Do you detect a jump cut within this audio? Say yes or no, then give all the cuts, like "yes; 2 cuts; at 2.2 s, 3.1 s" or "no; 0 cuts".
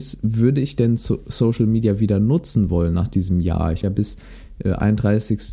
yes; 1 cut; at 3.8 s